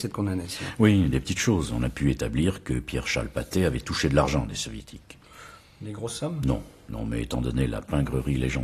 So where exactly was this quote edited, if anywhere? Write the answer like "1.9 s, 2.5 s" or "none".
none